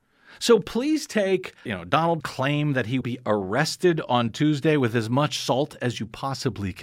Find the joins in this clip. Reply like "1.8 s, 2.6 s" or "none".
1.7 s, 2.2 s, 3.0 s

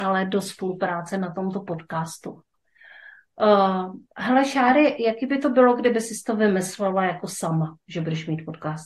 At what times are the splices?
4.1 s

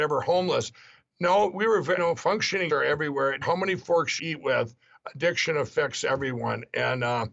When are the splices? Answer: 2.0 s, 2.7 s, 3.4 s, 4.2 s

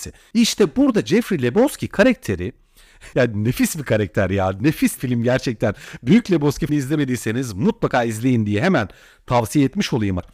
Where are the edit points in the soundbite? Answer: 3.1 s, 5.0 s, 6.7 s

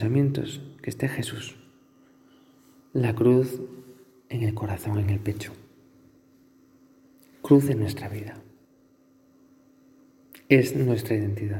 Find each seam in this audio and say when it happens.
none

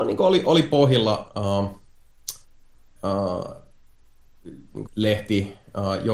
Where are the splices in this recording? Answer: 3.0 s, 4.9 s

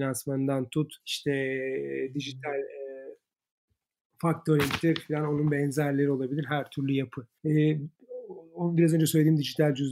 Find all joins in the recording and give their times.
1.0 s, 7.4 s

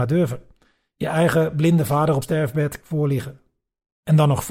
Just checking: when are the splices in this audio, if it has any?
2.2 s, 2.8 s

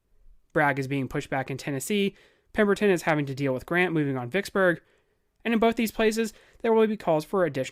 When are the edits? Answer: none

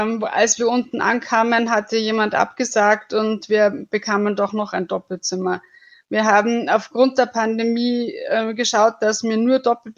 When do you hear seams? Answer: none

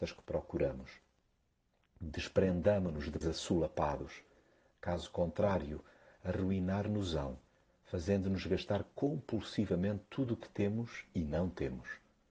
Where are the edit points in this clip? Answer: 3.2 s

